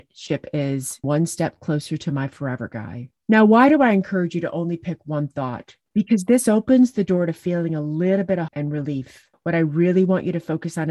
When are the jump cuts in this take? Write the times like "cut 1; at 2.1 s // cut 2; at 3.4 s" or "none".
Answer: cut 1; at 1.0 s // cut 2; at 8.5 s